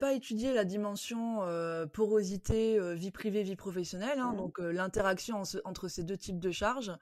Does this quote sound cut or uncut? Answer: uncut